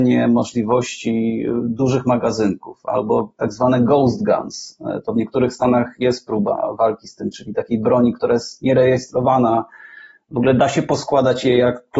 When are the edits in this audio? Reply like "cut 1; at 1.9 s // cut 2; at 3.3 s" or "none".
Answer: none